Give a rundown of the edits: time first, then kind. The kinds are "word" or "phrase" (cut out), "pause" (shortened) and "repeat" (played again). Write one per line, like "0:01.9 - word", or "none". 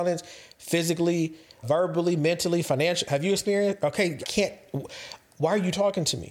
0:01.6 - word
0:04.2 - word